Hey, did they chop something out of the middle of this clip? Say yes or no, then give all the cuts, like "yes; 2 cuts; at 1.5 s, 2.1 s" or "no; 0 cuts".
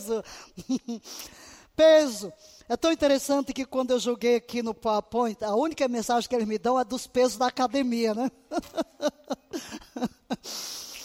no; 0 cuts